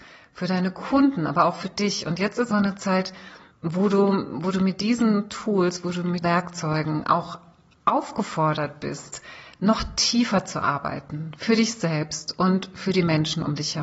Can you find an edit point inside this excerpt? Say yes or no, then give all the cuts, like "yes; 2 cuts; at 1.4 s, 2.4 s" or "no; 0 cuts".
yes; 2 cuts; at 2.5 s, 6.2 s